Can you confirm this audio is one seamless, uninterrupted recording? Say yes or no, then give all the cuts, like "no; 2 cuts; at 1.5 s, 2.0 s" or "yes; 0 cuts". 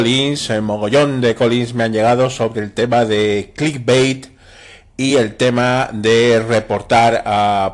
yes; 0 cuts